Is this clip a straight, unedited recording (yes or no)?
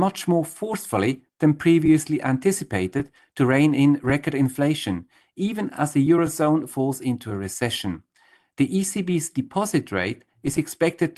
yes